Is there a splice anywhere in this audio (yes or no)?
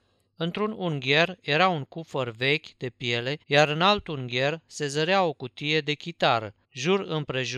yes